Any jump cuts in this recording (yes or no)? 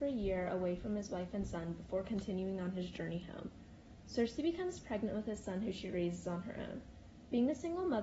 no